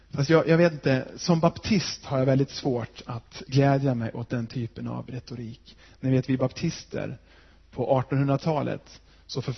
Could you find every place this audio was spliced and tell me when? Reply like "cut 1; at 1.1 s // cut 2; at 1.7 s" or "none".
none